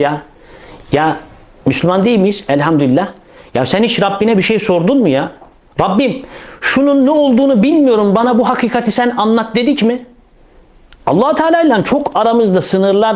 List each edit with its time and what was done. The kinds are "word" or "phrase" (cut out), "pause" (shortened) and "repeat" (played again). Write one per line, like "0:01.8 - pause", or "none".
none